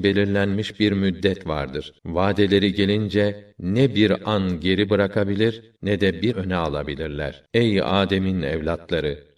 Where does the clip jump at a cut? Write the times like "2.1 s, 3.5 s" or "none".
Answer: 2.0 s, 3.5 s, 5.8 s, 6.3 s, 7.5 s